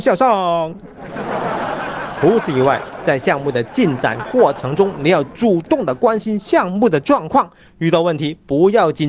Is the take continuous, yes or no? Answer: yes